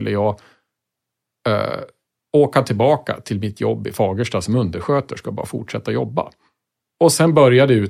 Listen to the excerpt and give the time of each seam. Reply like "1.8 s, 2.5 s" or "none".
none